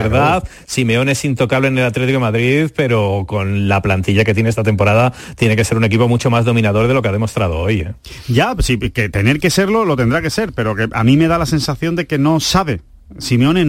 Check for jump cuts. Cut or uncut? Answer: uncut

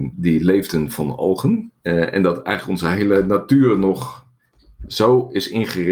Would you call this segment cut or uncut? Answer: cut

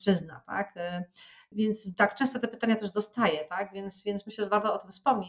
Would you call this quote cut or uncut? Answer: uncut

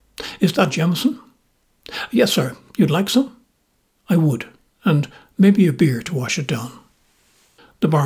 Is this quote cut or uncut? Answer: uncut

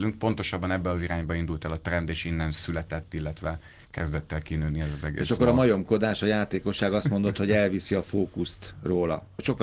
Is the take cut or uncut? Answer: uncut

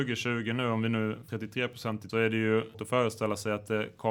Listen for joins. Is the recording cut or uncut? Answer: cut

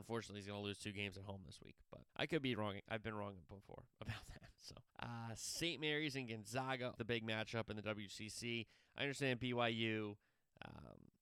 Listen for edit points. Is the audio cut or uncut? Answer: cut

